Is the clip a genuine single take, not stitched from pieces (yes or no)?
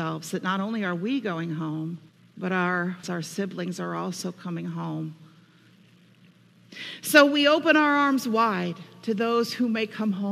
no